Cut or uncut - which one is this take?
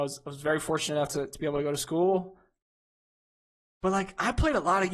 uncut